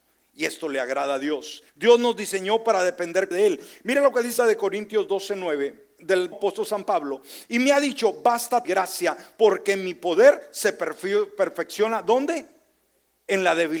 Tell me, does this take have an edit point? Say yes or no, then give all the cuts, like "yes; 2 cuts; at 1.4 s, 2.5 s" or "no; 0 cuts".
yes; 5 cuts; at 1.7 s, 3.3 s, 4.4 s, 6.3 s, 8.6 s